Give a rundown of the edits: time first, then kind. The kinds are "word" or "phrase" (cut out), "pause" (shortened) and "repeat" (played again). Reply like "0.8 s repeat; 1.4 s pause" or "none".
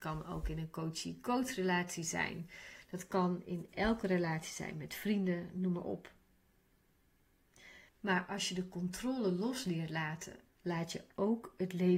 7.9 s pause